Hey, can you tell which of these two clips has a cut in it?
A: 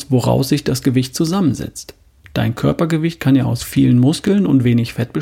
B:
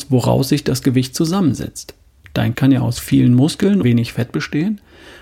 B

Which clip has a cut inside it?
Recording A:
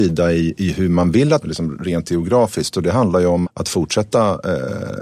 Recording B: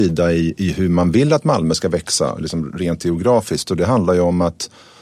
A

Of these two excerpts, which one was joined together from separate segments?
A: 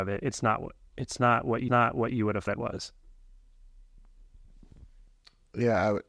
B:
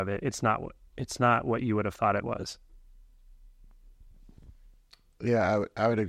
A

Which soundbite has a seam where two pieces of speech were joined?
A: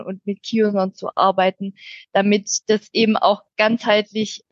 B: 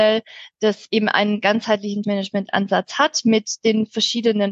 B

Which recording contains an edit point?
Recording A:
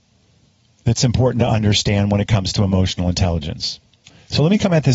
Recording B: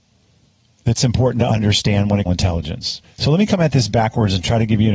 B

